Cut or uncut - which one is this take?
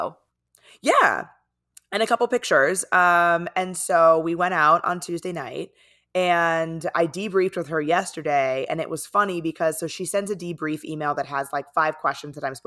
uncut